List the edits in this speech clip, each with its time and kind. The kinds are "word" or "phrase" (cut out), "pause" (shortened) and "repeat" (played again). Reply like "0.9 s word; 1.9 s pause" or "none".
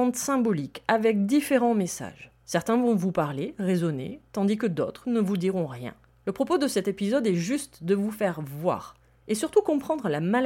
none